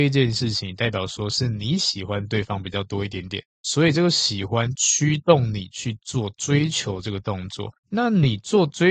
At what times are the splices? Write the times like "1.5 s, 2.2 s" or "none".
3.5 s, 7.8 s